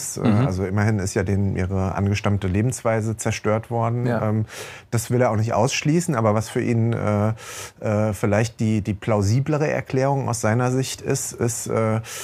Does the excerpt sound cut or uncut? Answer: uncut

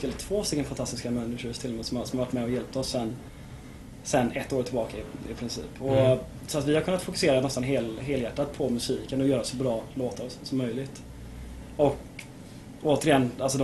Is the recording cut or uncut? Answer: uncut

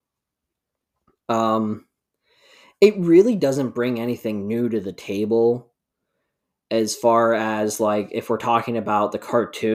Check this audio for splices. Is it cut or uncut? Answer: uncut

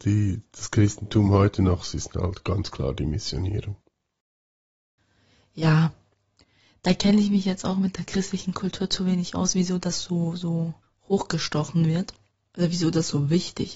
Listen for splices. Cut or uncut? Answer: uncut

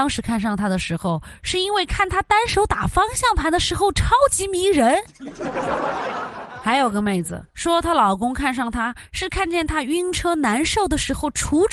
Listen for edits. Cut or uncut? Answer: cut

